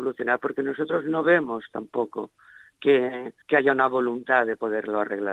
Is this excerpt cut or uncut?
cut